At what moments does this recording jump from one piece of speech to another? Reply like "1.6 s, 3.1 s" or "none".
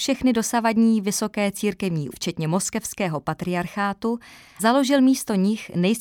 2.1 s, 4.6 s